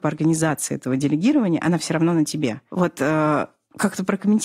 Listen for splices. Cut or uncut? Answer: uncut